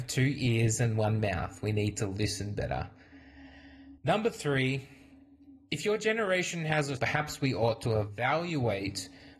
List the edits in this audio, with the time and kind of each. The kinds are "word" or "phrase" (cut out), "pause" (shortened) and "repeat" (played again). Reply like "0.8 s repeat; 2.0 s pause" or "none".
4.0 s pause; 7.0 s phrase